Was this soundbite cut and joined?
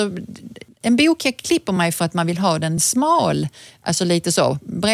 no; 0 cuts

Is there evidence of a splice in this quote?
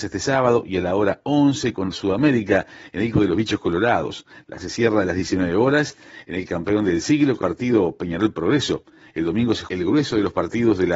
yes; 5 cuts; at 1.9 s, 3.1 s, 4.6 s, 7.4 s, 9.7 s

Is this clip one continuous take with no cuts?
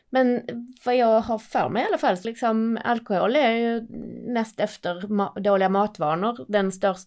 no; 1 cut; at 2.2 s

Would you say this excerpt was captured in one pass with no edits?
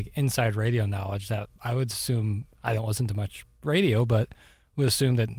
no; 1 cut; at 1.6 s

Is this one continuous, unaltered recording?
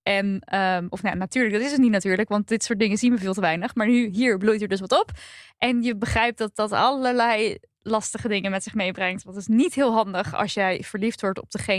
yes; 0 cuts

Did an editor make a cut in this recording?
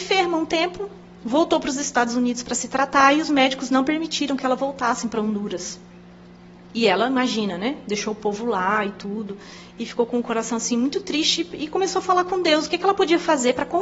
no; 0 cuts

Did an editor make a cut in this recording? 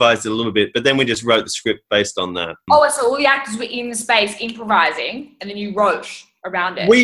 no; 0 cuts

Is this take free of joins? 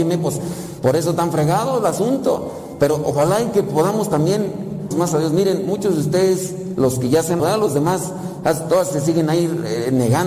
no; 2 cuts; at 4.9 s, 7.4 s

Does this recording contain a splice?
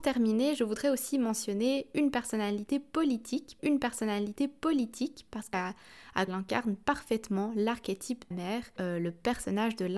yes; 5 cuts; at 3.6 s, 5.5 s, 6.3 s, 8.3 s, 8.8 s

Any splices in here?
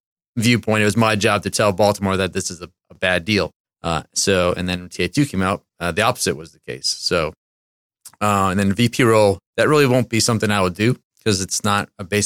yes; 4 cuts; at 3.6 s, 5.7 s, 9.5 s, 11.0 s

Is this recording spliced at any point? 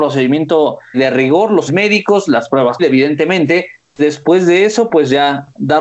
yes; 4 cuts; at 0.9 s, 1.7 s, 2.8 s, 4.0 s

